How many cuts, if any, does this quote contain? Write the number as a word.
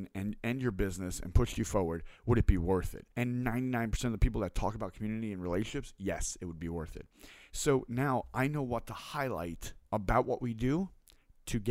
two